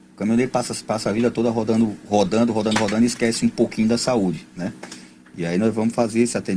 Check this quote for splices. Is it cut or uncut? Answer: uncut